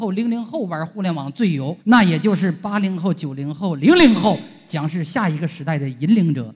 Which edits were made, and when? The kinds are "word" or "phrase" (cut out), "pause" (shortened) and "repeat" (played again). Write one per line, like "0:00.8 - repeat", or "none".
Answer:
0:01.8 - pause